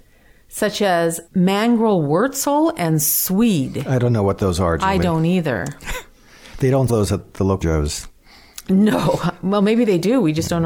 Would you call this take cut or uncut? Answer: cut